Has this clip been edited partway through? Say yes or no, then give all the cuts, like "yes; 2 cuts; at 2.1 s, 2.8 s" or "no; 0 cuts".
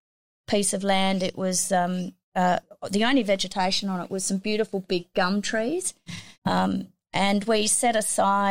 yes; 2 cuts; at 2.2 s, 6.3 s